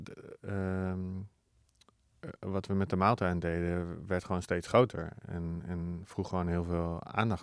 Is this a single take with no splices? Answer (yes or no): yes